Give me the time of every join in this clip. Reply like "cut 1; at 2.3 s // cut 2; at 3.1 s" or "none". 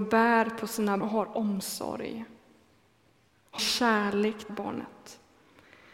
cut 1; at 1.0 s // cut 2; at 3.6 s // cut 3; at 4.5 s

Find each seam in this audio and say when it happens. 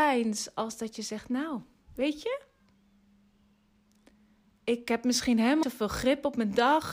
cut 1; at 5.6 s

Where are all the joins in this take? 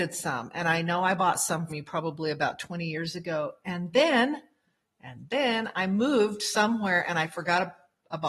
cut 1; at 1.7 s

